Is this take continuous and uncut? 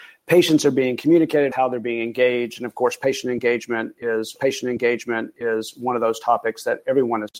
no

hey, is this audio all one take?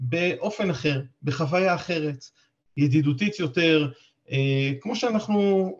yes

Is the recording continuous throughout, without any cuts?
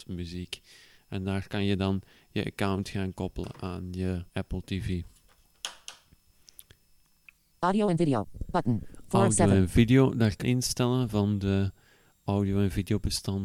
no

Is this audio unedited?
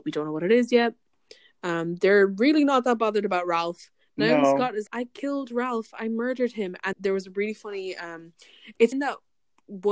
no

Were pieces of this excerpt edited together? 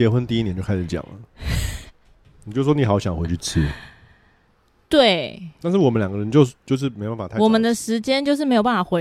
no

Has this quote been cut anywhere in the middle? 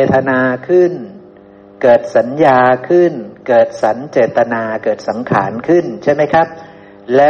no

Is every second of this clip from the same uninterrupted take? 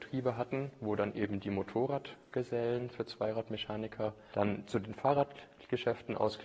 yes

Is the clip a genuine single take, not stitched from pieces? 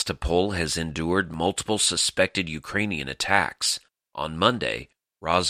yes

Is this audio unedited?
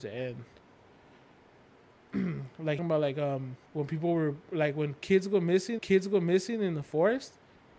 no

